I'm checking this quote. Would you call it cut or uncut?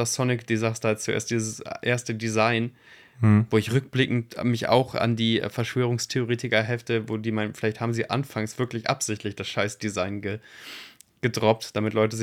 uncut